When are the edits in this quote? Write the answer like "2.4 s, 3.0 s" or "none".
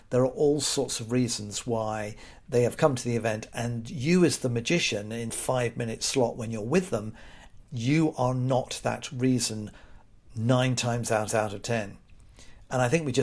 5.3 s, 11.3 s